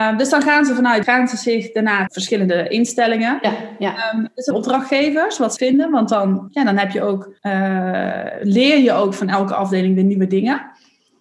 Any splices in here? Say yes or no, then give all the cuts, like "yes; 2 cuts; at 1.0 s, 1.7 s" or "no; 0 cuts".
yes; 6 cuts; at 1.0 s, 2.1 s, 4.5 s, 5.6 s, 6.5 s, 7.4 s